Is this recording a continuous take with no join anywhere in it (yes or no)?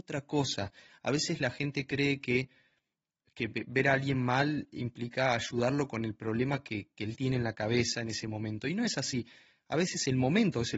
yes